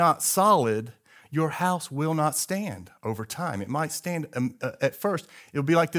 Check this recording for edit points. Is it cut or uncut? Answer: uncut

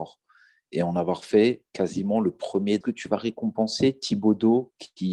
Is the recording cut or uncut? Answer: cut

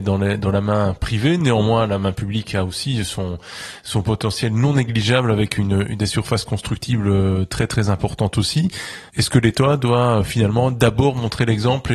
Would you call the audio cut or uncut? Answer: cut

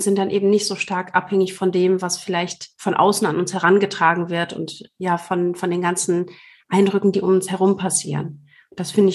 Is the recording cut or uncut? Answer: uncut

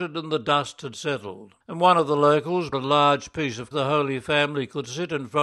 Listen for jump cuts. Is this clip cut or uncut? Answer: cut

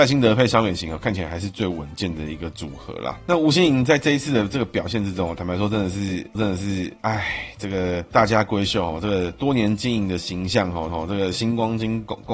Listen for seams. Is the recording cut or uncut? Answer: cut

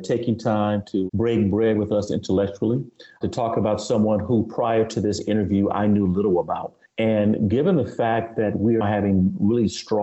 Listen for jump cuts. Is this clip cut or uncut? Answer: cut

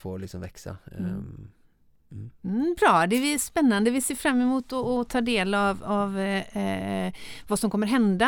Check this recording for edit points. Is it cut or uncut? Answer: uncut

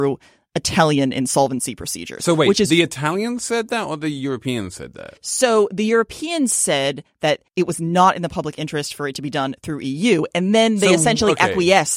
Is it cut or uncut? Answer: cut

